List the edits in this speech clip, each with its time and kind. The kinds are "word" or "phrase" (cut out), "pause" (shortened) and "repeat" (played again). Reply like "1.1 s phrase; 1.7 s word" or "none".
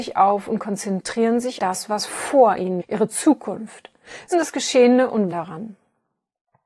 1.6 s word; 2.8 s word; 4.3 s word; 5.3 s word